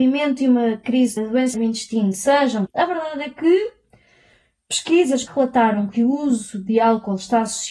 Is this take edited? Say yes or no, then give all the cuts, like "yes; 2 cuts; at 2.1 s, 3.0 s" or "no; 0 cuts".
yes; 4 cuts; at 1.2 s, 1.5 s, 2.7 s, 5.3 s